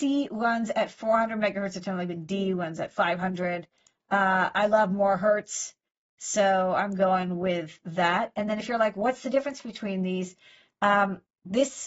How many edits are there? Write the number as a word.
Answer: zero